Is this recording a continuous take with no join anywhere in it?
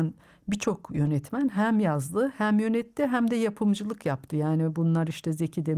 yes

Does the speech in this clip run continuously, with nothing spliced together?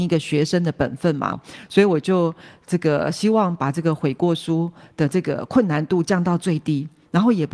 no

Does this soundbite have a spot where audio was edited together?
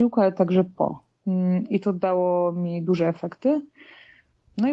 no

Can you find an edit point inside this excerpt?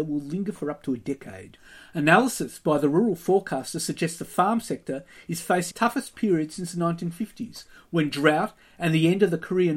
yes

